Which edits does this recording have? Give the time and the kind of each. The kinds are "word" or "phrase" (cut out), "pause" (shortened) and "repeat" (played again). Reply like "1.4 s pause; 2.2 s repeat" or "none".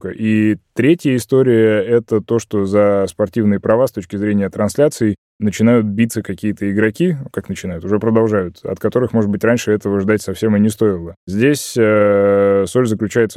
none

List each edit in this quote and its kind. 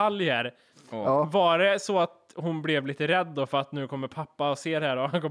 none

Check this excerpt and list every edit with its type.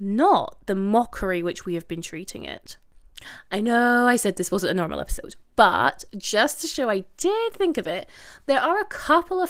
none

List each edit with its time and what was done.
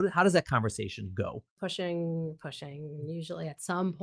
1.5 s pause

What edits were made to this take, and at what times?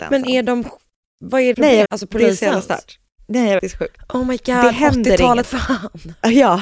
1.5 s word; 1.8 s word; 3.6 s word; 5.4 s word

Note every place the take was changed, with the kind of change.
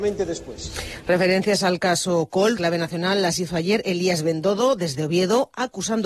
2.6 s word

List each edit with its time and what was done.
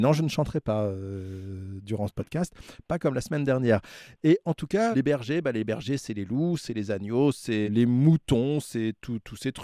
4.9 s word; 7.7 s word

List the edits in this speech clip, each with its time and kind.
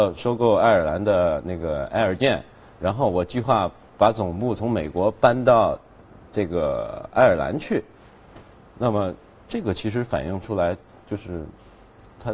none

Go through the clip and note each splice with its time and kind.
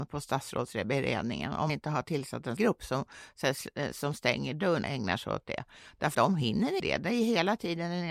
1.7 s word; 2.6 s word; 4.8 s word; 6.1 s word; 6.8 s word

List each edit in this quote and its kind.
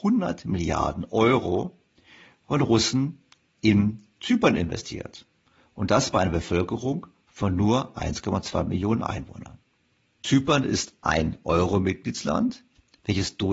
none

